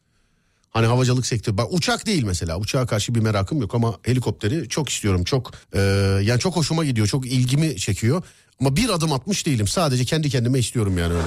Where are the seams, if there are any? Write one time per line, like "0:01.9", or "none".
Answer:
0:05.6